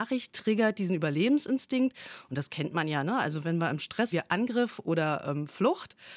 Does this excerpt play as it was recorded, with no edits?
no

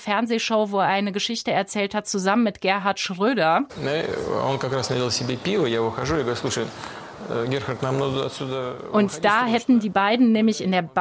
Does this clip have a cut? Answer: no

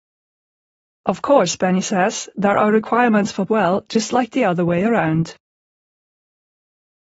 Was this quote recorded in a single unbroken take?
no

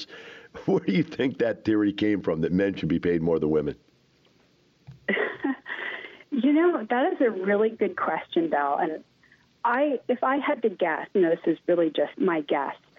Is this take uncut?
yes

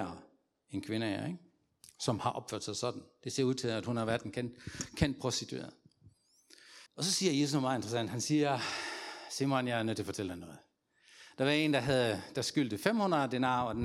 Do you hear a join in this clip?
yes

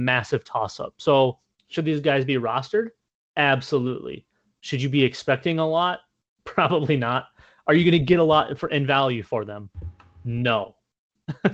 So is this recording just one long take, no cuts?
yes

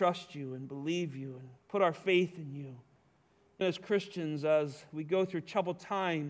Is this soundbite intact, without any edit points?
no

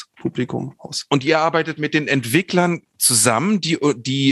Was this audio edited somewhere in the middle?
no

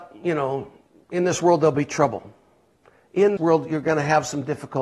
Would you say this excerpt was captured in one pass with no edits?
no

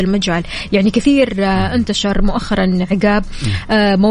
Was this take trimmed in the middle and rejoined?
no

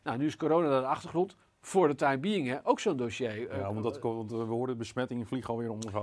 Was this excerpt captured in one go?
yes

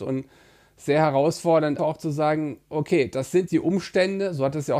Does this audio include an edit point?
yes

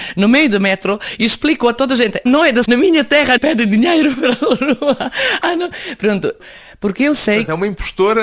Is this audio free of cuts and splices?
no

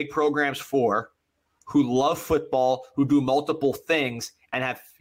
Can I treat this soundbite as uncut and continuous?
yes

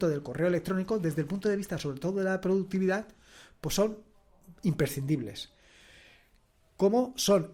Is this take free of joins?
yes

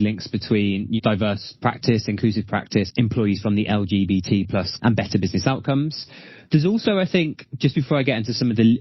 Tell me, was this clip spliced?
yes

